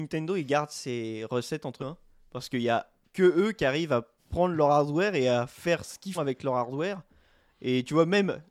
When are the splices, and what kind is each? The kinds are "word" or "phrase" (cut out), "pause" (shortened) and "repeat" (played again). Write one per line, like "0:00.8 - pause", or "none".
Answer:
0:01.8 - phrase
0:04.2 - pause
0:06.1 - word